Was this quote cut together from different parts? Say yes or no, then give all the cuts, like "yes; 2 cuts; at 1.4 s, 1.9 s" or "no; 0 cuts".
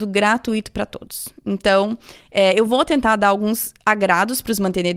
no; 0 cuts